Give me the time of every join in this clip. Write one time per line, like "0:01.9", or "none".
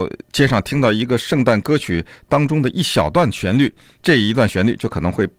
none